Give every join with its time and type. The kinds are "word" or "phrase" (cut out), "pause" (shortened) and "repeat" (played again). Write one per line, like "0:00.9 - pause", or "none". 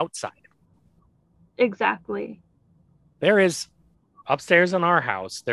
none